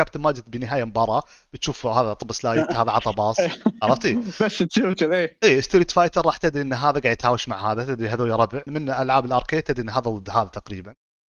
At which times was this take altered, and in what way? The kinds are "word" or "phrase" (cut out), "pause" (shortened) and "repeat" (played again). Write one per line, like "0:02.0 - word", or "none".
0:08.7 - word